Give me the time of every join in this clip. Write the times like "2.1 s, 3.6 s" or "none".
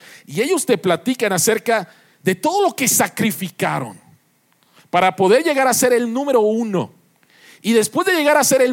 none